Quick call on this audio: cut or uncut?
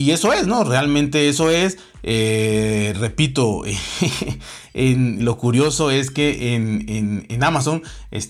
cut